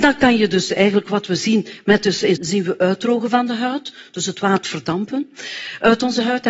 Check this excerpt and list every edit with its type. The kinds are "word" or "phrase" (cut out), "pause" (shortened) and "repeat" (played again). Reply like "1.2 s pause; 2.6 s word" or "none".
2.4 s word; 4.6 s word